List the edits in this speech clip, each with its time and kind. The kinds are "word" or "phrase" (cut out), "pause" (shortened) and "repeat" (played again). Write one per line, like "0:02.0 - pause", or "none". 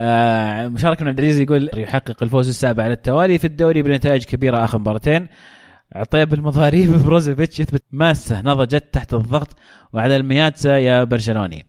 0:01.7 - word
0:07.8 - word